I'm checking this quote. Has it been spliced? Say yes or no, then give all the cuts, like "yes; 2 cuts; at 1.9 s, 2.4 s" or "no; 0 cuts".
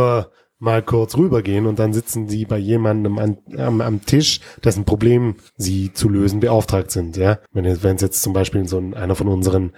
yes; 2 cuts; at 5.5 s, 7.5 s